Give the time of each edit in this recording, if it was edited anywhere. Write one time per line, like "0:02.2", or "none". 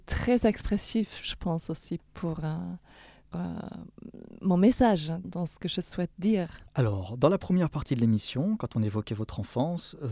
0:02.0
0:03.3
0:05.2
0:06.7